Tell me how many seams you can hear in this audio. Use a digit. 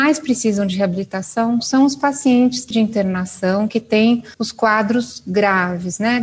2